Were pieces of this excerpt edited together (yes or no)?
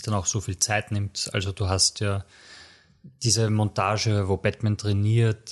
no